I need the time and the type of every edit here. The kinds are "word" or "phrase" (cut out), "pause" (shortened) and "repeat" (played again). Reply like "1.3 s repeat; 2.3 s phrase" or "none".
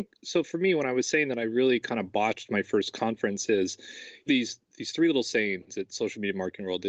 4.3 s phrase